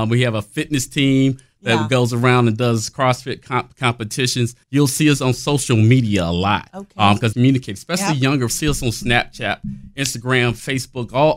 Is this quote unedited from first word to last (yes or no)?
no